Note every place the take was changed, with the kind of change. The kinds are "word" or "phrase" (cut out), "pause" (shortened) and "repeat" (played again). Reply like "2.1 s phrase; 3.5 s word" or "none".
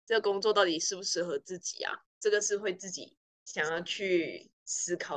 3.2 s pause